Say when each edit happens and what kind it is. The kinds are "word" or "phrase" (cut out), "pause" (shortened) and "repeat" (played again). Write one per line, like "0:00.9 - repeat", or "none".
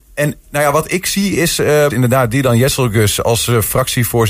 0:01.9 - phrase